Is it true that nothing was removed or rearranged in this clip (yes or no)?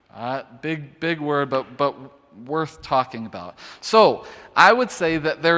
yes